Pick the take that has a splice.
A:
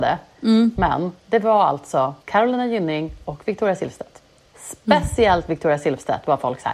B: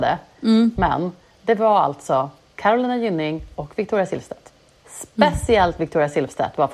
A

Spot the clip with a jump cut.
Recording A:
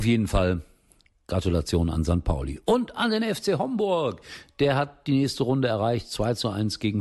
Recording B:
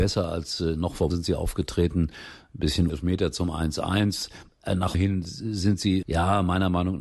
B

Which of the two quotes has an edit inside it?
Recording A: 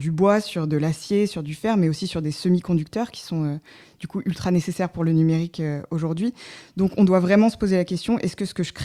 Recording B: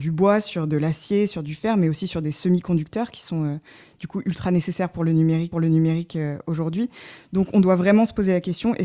B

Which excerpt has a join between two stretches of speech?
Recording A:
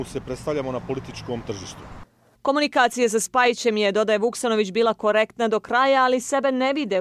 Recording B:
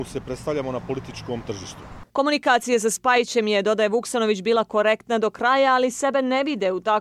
B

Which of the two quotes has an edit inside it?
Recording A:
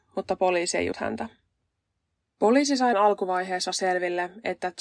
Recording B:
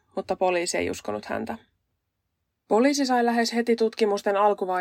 A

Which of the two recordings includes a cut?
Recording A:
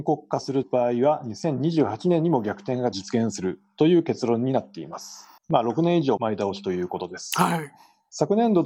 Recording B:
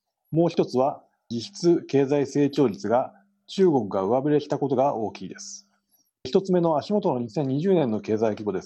A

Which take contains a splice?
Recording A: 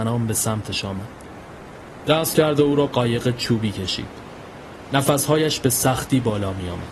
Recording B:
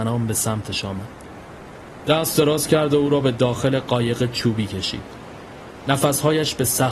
A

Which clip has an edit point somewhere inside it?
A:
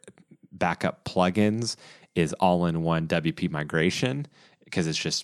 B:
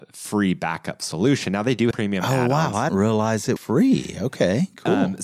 B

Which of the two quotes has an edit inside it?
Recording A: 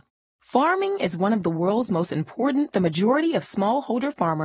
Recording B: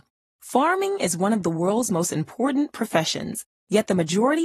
A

